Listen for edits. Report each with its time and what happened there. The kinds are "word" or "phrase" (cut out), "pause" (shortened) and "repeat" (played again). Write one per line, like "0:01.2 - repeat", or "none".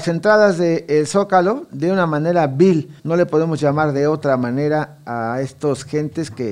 0:03.0 - pause